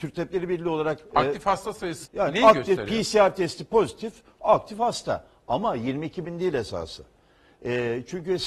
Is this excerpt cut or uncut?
cut